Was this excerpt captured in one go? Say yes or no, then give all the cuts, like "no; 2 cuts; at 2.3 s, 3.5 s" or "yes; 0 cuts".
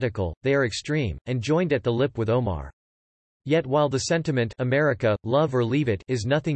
yes; 0 cuts